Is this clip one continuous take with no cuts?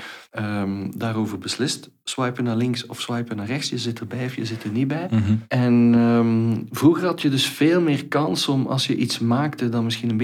yes; 0 cuts

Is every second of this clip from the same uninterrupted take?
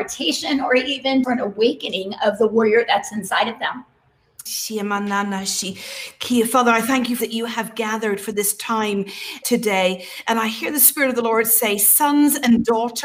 no; 4 cuts; at 1.2 s, 4.5 s, 7.2 s, 9.4 s

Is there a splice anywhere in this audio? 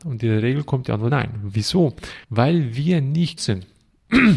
yes; 3 cuts; at 1.1 s, 2.2 s, 3.4 s

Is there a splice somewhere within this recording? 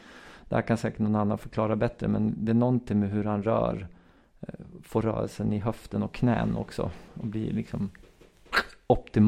no; 0 cuts

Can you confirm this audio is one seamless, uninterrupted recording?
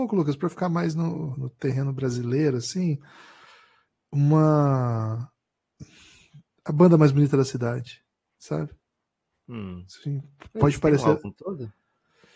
yes; 0 cuts

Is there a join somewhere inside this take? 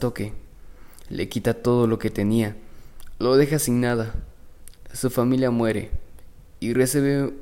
no; 0 cuts

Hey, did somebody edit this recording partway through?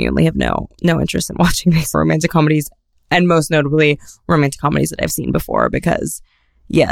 yes; 1 cut; at 1.9 s

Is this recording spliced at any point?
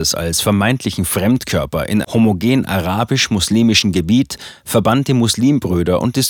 yes; 1 cut; at 2.0 s

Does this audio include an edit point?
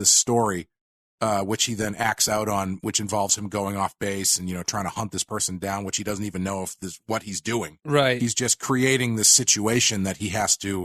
no; 0 cuts

